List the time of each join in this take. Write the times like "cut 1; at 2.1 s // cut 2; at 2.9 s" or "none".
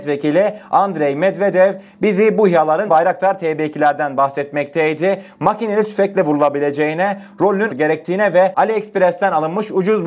cut 1; at 2.9 s // cut 2; at 7.7 s